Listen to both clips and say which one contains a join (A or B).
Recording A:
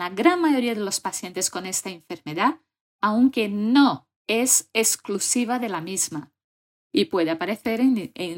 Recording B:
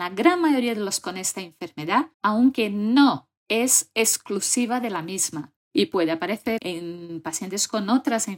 B